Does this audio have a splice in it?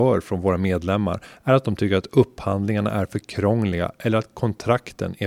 no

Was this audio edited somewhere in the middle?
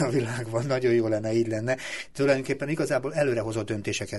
no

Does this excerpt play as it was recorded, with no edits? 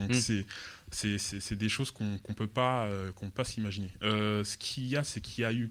yes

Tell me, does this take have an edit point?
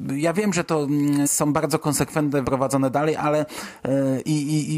yes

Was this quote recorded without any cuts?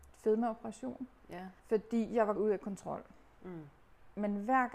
no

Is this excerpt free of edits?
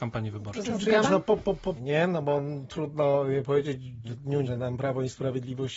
no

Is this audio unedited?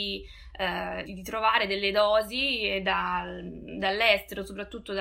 no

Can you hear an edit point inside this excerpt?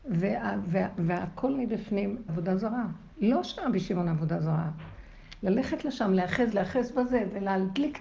yes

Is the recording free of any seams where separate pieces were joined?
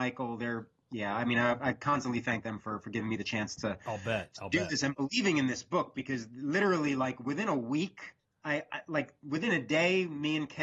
yes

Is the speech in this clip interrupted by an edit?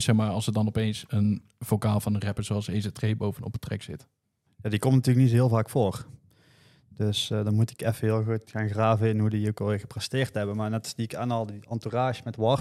no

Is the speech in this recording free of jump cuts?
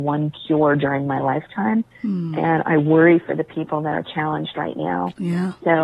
yes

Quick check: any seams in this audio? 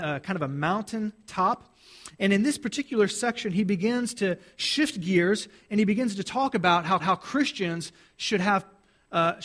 yes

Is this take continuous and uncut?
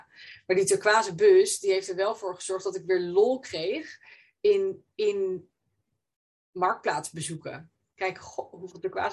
yes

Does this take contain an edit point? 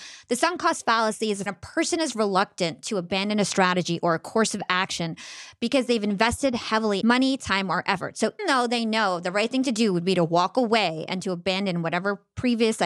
yes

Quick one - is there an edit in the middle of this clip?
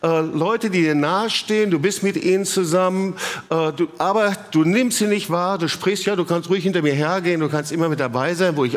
no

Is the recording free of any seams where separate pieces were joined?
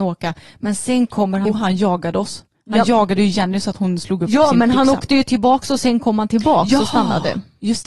no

